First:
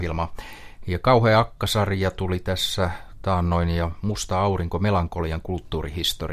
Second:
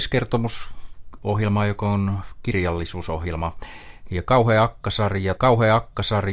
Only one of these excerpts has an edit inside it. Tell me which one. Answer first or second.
second